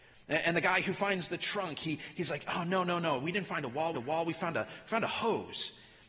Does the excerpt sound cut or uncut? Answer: cut